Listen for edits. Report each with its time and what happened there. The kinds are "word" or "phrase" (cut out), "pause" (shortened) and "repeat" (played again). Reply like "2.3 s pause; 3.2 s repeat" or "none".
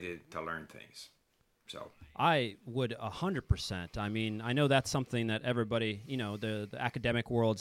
none